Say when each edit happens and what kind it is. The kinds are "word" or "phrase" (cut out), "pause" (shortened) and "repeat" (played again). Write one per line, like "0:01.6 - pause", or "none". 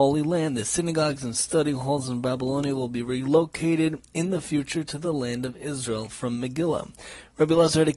none